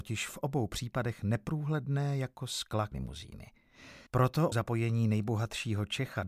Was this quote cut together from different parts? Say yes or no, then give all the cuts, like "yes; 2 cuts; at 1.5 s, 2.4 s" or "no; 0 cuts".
yes; 3 cuts; at 2.9 s, 4.1 s, 4.5 s